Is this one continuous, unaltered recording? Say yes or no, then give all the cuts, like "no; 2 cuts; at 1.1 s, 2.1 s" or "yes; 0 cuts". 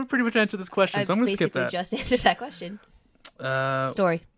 yes; 0 cuts